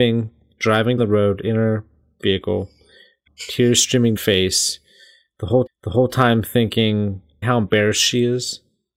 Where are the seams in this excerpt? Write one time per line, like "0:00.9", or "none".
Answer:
0:01.0
0:03.3
0:04.2
0:05.7
0:07.4